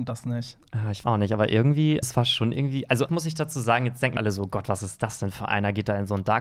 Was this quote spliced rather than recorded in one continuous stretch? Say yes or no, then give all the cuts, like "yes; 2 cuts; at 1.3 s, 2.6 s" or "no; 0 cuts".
yes; 4 cuts; at 1.0 s, 2.0 s, 3.1 s, 4.2 s